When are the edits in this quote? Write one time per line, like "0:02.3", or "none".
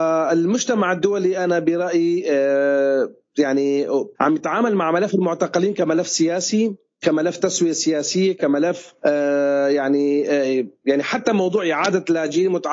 0:04.2
0:09.0